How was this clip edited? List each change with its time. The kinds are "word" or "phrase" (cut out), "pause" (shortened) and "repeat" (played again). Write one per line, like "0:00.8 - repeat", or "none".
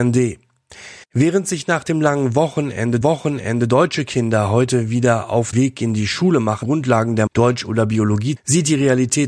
0:01.0 - pause
0:03.0 - repeat
0:05.5 - word
0:06.6 - word
0:07.3 - word
0:08.4 - phrase